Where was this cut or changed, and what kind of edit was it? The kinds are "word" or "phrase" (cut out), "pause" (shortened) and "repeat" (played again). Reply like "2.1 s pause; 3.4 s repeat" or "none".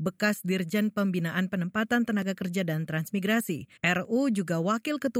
3.8 s pause